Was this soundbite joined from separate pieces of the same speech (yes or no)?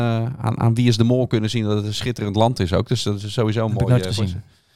no